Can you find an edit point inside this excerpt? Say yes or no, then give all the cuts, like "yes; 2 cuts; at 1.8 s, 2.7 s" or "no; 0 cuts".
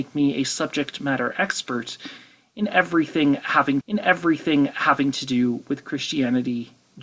yes; 1 cut; at 3.8 s